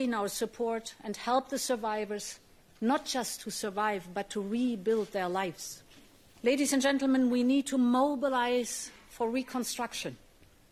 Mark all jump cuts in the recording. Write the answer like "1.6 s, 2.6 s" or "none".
none

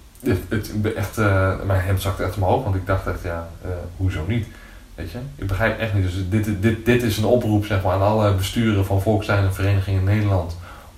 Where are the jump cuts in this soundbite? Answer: none

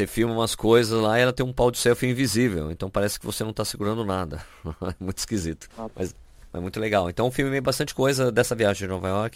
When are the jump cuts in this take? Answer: 5.7 s

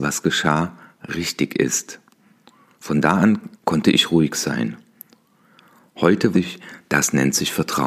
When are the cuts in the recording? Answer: 3.5 s, 6.3 s

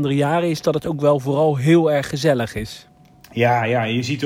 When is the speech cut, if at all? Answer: none

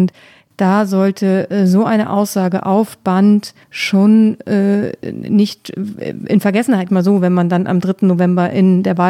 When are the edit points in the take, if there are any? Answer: 3.6 s, 6.9 s

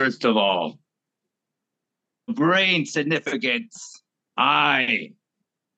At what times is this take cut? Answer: 2.3 s, 4.2 s

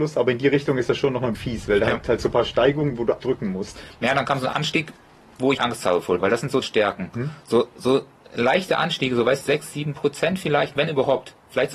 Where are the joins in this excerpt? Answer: 1.3 s, 3.2 s, 5.6 s, 6.2 s, 6.6 s, 9.4 s

